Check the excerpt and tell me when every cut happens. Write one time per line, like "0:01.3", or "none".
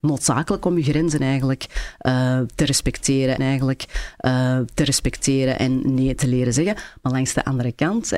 0:03.4